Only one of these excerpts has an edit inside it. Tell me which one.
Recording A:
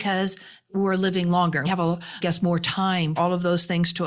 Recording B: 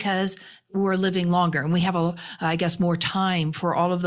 A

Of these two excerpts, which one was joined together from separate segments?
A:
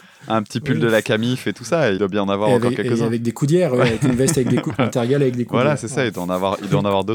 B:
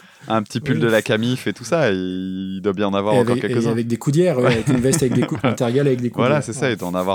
A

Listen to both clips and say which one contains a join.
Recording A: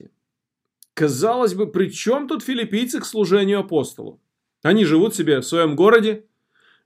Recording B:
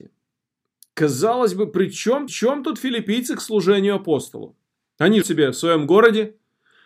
B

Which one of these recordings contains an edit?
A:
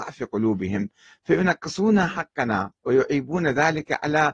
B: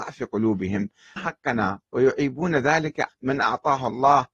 B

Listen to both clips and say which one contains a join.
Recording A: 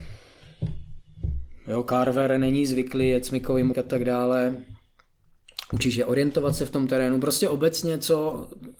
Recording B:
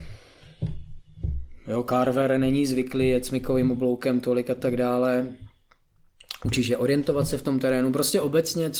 A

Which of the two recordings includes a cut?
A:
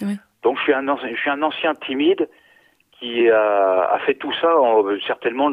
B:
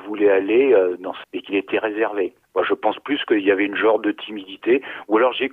B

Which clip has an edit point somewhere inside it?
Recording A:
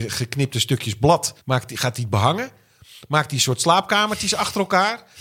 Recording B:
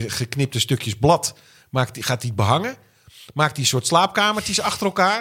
A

